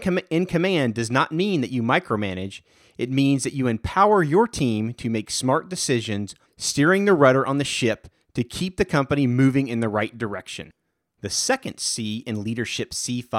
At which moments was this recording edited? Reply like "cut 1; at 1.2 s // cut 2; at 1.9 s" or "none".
cut 1; at 6.4 s